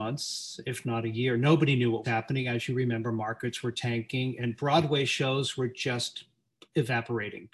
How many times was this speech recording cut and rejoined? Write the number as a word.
one